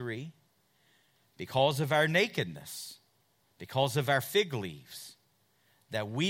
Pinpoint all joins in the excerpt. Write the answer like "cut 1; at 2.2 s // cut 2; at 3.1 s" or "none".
none